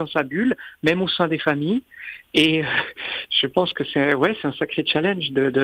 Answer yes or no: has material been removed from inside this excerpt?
no